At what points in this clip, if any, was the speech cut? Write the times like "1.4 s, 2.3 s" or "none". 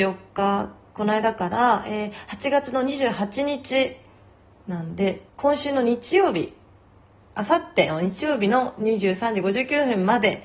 5.3 s